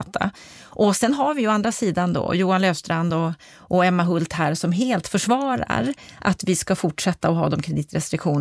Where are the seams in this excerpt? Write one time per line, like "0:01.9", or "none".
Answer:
none